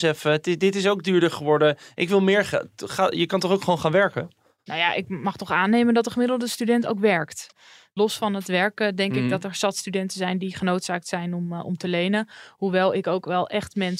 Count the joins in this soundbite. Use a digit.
0